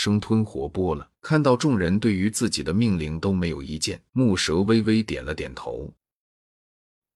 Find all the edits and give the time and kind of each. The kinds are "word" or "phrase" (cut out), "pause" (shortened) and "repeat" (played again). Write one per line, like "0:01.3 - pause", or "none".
0:01.2 - pause
0:04.1 - pause